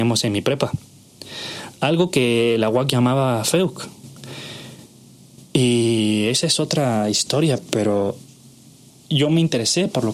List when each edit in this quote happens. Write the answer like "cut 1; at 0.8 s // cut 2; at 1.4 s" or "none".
none

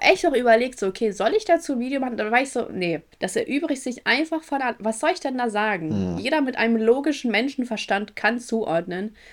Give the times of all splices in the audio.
cut 1; at 3.1 s

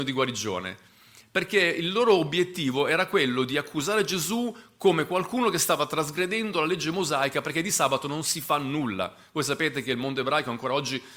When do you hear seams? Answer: none

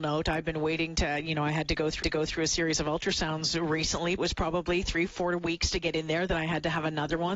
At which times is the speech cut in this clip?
cut 1; at 2.0 s // cut 2; at 4.2 s

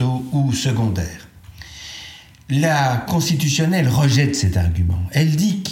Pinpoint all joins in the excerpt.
cut 1; at 3.1 s

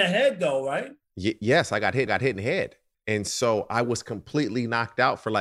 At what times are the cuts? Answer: cut 1; at 2.1 s // cut 2; at 2.9 s

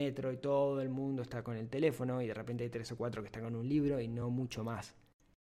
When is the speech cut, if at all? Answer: none

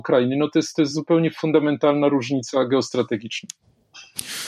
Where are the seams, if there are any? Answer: none

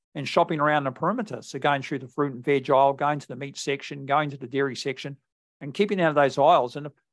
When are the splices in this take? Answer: none

